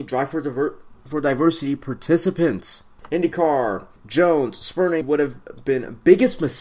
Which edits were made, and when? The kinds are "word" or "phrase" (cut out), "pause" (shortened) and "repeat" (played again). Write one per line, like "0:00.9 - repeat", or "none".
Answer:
0:04.0 - pause
0:05.0 - phrase